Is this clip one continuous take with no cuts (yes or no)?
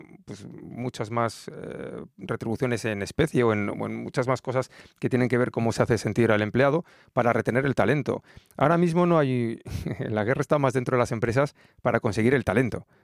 yes